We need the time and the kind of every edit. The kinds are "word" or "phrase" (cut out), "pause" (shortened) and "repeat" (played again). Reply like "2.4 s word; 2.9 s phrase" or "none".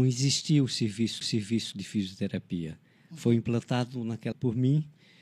1.2 s repeat; 4.3 s word